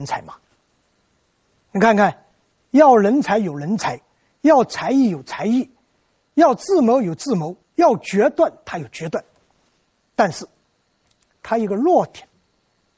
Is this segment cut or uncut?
uncut